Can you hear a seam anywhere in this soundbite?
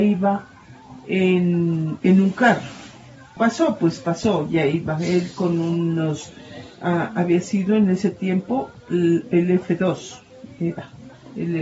yes; 1 cut; at 2.0 s

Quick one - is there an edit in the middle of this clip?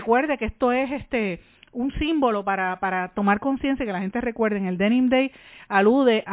no; 0 cuts

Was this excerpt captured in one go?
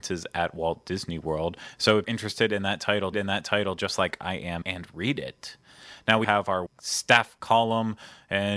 no; 5 cuts; at 2.0 s, 3.1 s, 4.6 s, 6.2 s, 6.7 s

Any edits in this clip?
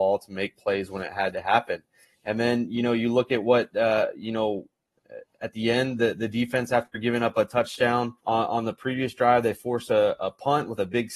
yes; 1 cut; at 8.2 s

